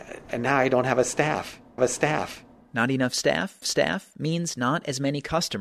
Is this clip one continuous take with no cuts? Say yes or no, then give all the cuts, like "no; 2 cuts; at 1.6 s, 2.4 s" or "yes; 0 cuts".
no; 2 cuts; at 1.8 s, 3.6 s